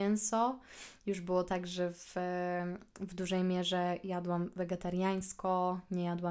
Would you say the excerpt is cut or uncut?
uncut